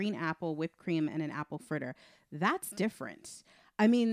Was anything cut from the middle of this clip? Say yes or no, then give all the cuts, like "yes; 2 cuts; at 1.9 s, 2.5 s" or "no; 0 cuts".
no; 0 cuts